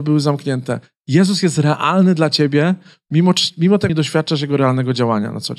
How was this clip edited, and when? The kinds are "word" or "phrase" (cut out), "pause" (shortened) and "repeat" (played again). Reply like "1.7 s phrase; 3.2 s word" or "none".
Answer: 3.9 s phrase